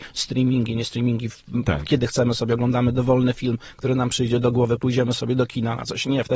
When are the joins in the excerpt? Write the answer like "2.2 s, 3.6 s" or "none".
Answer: none